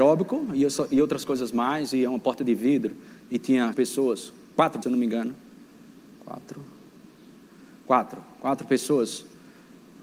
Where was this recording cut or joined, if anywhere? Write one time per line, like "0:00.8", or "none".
0:03.7
0:04.8